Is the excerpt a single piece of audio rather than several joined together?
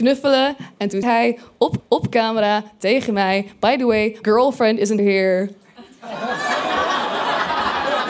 no; 4 cuts; at 1.0 s, 1.8 s, 4.2 s, 5.0 s

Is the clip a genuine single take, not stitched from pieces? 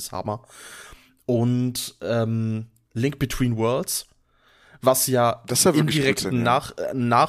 yes; 0 cuts

